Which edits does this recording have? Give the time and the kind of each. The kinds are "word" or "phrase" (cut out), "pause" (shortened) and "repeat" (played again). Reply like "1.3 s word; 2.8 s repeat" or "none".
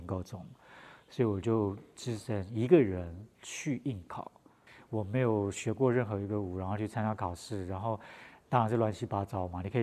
3.3 s pause